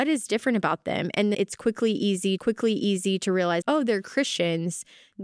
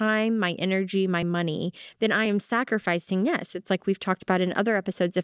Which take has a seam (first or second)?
first